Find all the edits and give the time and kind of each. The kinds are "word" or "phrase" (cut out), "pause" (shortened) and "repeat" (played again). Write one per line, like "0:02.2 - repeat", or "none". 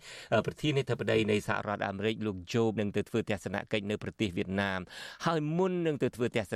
0:02.8 - word